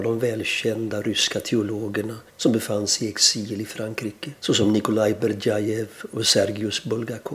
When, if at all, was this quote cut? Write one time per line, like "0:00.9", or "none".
0:02.3
0:04.4